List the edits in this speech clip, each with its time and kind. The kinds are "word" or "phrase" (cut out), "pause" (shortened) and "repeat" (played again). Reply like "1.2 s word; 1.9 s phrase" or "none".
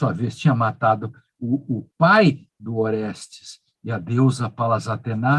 none

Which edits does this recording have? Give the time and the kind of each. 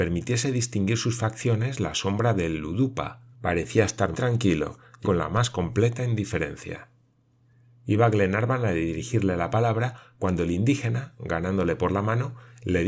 3.3 s pause; 4.1 s word; 5.0 s word

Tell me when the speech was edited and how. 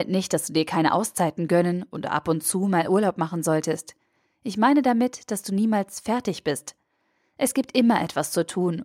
none

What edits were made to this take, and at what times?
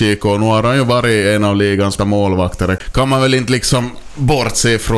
2.0 s word

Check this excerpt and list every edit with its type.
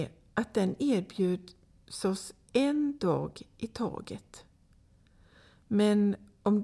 none

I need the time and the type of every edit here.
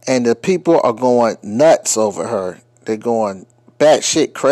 none

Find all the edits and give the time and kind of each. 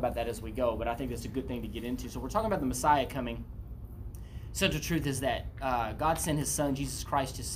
none

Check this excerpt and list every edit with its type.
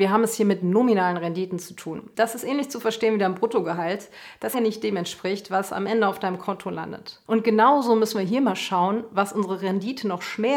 4.5 s phrase

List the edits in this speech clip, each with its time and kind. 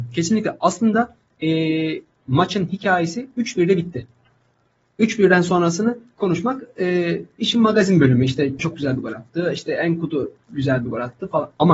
8.6 s word; 10.4 s pause

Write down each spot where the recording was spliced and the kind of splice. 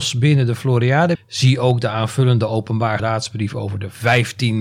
1.1 s word; 3.0 s phrase

